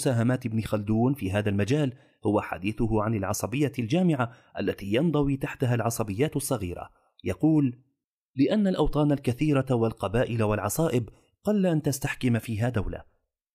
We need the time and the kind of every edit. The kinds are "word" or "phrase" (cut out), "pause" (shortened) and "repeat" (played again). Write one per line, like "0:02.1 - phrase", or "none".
none